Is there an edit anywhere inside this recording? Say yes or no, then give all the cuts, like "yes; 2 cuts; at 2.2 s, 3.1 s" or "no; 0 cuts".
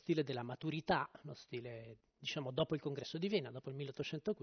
no; 0 cuts